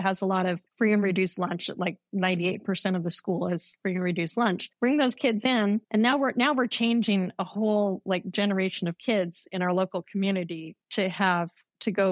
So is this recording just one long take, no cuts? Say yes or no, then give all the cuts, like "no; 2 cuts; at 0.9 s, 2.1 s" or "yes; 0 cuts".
no; 2 cuts; at 4.7 s, 5.8 s